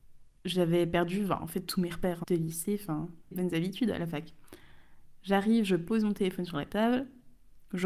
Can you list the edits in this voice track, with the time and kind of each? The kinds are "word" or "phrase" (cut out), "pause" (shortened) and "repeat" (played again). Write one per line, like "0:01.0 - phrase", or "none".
0:02.2 - word
0:03.3 - phrase